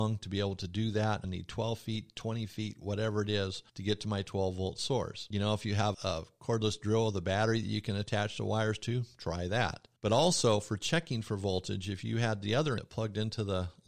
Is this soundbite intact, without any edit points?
no; 5 cuts; at 1.2 s, 3.7 s, 5.9 s, 10.0 s, 12.8 s

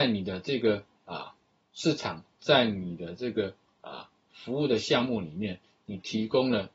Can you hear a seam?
no; 0 cuts

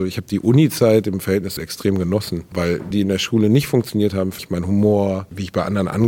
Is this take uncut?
no; 3 cuts; at 1.6 s, 2.9 s, 4.4 s

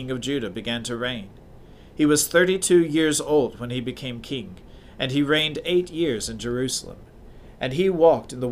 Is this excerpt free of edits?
yes; 0 cuts

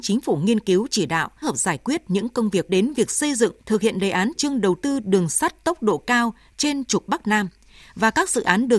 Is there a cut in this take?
yes; 4 cuts; at 1.4 s, 2.7 s, 3.6 s, 4.3 s

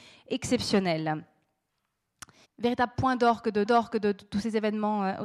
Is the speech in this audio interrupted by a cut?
yes; 2 cuts; at 2.4 s, 3.6 s

